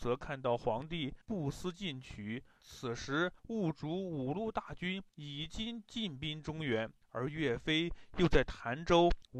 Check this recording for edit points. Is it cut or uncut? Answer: cut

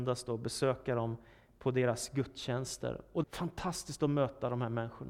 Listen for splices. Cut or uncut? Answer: cut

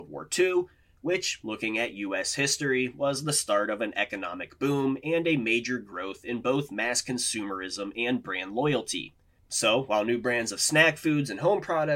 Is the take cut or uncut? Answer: uncut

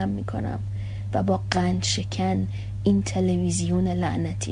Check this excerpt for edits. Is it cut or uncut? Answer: uncut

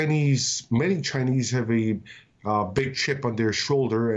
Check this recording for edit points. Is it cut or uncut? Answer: uncut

